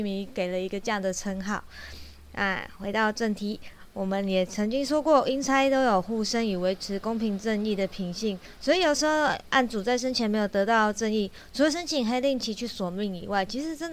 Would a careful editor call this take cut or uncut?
uncut